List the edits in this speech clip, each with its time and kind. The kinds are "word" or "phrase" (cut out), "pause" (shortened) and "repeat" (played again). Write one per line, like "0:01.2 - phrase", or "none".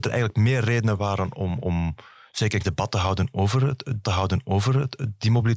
0:01.6 - word
0:02.6 - word
0:04.0 - repeat